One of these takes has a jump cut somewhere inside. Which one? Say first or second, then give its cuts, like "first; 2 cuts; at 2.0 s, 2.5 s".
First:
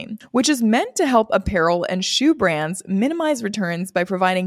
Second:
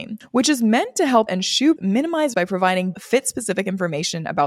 second; 4 cuts; at 1.3 s, 1.8 s, 2.3 s, 2.9 s